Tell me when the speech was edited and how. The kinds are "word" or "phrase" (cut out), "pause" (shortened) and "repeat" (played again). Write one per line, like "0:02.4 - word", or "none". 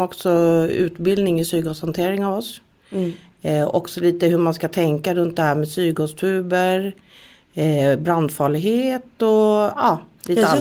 none